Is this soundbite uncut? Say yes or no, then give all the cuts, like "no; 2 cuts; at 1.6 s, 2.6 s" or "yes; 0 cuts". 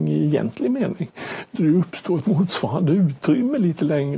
no; 1 cut; at 1.6 s